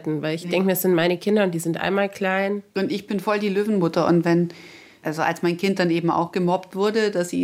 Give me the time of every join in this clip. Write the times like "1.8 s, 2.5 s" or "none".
none